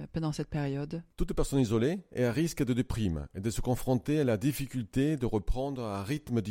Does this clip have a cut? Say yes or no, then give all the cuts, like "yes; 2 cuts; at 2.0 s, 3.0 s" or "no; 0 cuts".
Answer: no; 0 cuts